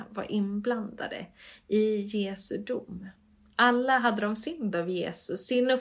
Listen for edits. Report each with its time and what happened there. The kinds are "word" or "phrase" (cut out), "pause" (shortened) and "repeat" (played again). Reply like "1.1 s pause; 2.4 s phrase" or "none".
4.7 s word